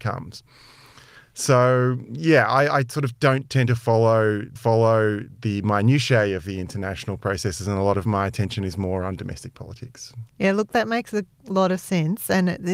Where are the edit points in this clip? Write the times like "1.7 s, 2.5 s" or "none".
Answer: 4.6 s, 10.3 s